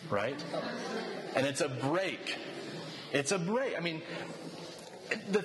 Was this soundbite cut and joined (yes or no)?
no